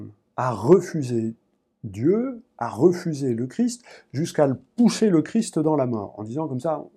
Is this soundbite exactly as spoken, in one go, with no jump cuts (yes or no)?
yes